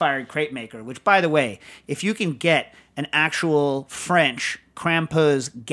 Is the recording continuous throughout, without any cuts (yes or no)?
yes